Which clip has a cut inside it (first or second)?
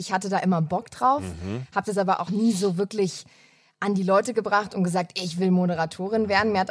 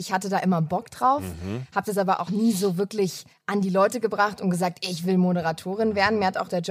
second